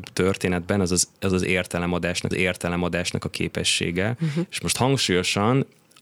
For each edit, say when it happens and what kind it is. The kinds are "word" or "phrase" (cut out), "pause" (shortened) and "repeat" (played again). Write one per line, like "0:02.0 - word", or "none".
0:02.3 - repeat

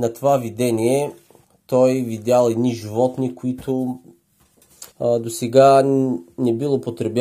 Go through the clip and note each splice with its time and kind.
0:01.4 - pause
0:04.9 - pause

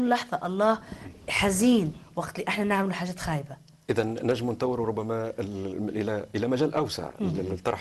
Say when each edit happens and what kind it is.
none

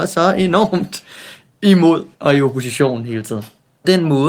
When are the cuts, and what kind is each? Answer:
0:02.1 - pause

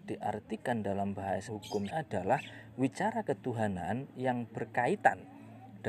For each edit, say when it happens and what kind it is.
0:01.5 - word
0:01.9 - word

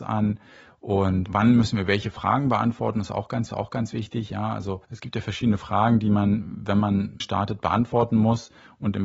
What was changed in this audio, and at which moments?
0:01.3 - word
0:03.5 - repeat
0:04.8 - pause
0:07.2 - phrase

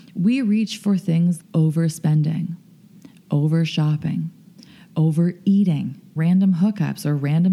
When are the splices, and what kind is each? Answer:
0:01.4 - word
0:06.2 - word

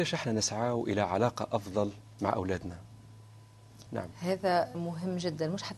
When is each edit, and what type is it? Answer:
0:03.9 - pause
0:04.7 - word

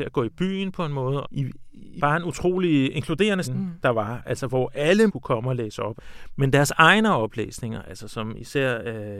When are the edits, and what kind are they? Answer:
0:01.2 - phrase
0:02.0 - word
0:03.4 - word
0:05.1 - word

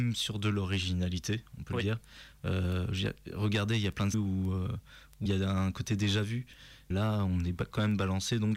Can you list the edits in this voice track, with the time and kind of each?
0:04.1 - word
0:05.3 - word
0:06.9 - word

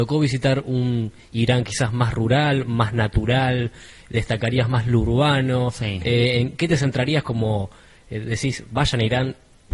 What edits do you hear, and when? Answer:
none

